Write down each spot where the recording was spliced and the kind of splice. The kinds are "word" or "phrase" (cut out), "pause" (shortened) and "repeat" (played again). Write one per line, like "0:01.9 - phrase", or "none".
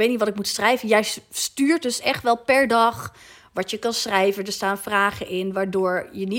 none